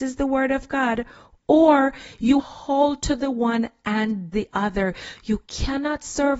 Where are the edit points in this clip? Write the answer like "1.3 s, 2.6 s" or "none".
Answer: 2.4 s, 4.3 s